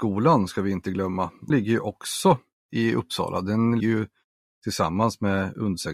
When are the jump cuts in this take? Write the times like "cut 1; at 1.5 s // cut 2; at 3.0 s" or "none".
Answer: cut 1; at 1.5 s // cut 2; at 3.8 s